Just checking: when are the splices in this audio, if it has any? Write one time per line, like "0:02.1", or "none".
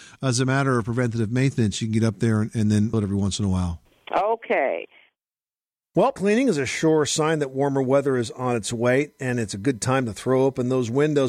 0:02.9
0:06.2